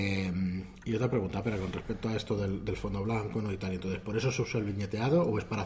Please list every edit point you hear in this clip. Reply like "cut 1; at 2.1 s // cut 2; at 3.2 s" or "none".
none